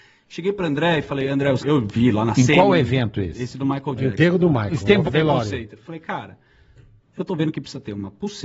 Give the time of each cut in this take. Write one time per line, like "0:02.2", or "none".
0:01.6
0:05.1